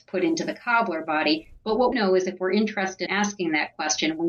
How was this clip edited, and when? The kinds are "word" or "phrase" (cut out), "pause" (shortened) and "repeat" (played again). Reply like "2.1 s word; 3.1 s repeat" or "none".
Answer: 1.9 s phrase; 3.1 s word